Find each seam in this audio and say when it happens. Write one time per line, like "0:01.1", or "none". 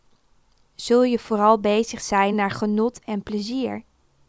0:02.3